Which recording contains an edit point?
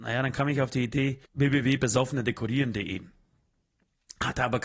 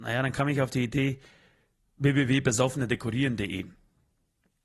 first; 1 cut; at 1.3 s

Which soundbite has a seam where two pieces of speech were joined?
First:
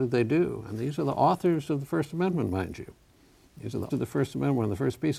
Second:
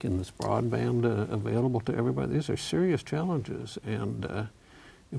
first; 1 cut; at 3.9 s

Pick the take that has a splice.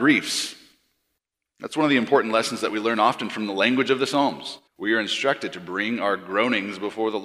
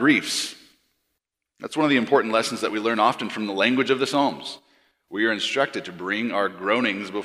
first; 1 cut; at 4.7 s

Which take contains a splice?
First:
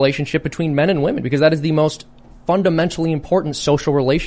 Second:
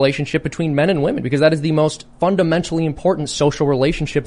second; 1 cut; at 2.1 s

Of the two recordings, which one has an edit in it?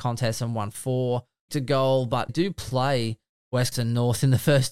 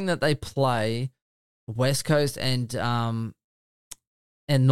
first; 3 cuts; at 1.5 s, 2.3 s, 3.7 s

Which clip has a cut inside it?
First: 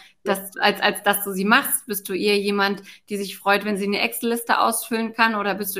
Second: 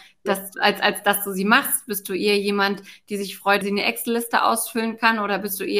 second; 1 cut; at 3.6 s

